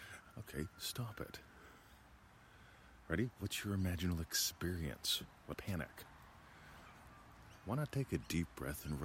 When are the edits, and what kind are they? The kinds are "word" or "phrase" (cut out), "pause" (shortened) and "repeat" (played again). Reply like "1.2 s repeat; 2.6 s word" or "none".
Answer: 5.5 s phrase